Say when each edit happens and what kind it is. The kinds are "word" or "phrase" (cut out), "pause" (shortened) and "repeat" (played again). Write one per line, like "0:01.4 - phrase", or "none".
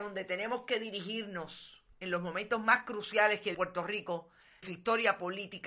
0:01.9 - pause
0:03.5 - word
0:04.6 - word